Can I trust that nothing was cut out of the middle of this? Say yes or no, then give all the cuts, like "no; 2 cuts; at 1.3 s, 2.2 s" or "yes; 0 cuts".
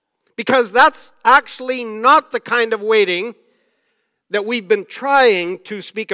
yes; 0 cuts